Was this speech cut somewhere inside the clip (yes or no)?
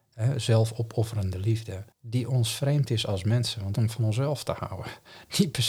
yes